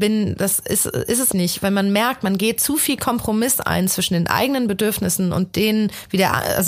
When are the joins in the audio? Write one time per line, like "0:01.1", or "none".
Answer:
0:01.3